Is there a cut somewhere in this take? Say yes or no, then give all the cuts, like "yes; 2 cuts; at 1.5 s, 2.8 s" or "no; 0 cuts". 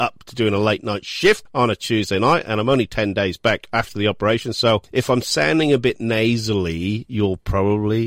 no; 0 cuts